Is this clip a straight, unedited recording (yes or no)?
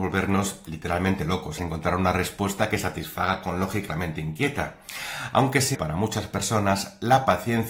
no